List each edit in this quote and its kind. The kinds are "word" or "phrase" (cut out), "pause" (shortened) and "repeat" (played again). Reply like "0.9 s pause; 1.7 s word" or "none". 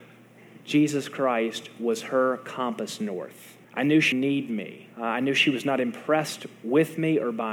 3.6 s pause; 4.1 s word; 4.9 s pause